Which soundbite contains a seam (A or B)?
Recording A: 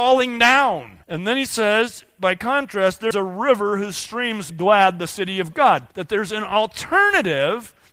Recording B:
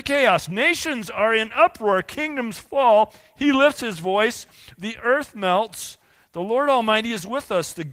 A